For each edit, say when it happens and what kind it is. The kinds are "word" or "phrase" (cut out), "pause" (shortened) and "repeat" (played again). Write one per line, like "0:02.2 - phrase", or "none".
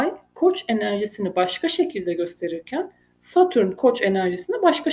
none